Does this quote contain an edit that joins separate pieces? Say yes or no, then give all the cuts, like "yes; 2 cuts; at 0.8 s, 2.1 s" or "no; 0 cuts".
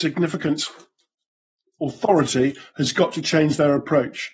no; 0 cuts